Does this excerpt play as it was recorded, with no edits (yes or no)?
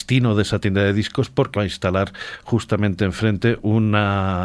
no